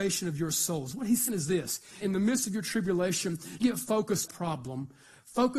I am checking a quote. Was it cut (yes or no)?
yes